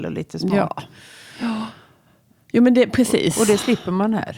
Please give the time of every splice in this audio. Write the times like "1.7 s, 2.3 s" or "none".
none

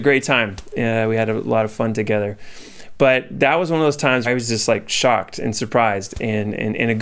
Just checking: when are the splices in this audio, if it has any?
4.2 s

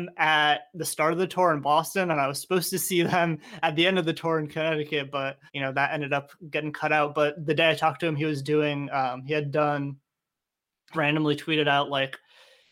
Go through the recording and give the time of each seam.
5.5 s, 10.9 s

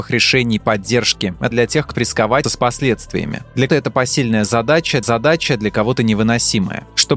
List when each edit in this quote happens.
1.5 s, 1.9 s, 2.4 s, 3.7 s, 5.0 s

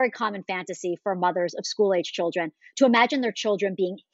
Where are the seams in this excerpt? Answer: none

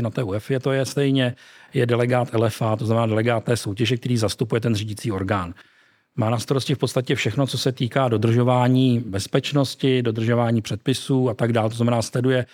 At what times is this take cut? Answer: none

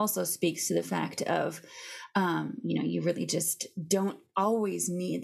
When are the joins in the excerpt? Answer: none

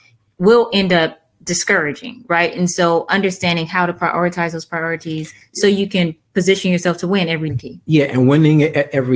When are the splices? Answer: 7.5 s

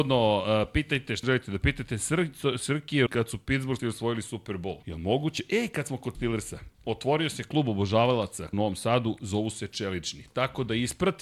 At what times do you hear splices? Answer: 1.2 s, 3.1 s, 3.8 s, 4.8 s, 6.1 s, 6.7 s, 8.5 s

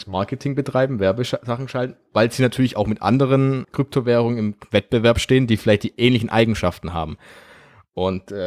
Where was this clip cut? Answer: 3.6 s

